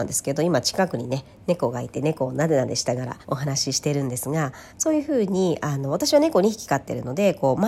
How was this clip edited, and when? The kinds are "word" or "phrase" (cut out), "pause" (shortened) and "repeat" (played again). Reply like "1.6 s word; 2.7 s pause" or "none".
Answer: 3.2 s pause; 4.7 s pause